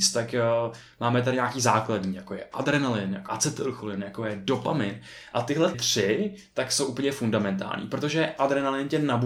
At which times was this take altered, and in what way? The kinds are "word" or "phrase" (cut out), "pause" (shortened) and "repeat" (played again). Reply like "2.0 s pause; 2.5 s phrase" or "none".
3.3 s word; 5.7 s word